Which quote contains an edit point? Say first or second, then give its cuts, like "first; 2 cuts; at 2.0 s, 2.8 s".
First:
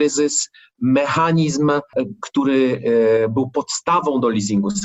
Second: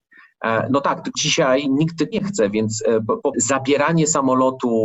second; 3 cuts; at 1.1 s, 2.1 s, 3.3 s